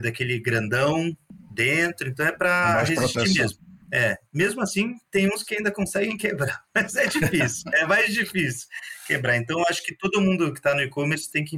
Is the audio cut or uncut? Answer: cut